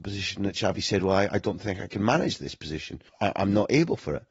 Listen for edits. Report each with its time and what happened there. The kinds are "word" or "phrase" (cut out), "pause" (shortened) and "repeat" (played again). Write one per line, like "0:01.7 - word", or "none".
0:03.1 - pause